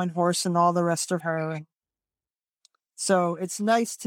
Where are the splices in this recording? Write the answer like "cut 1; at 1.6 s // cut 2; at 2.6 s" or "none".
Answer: cut 1; at 1.2 s